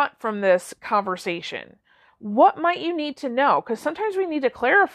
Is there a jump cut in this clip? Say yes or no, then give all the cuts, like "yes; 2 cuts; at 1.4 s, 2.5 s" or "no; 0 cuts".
no; 0 cuts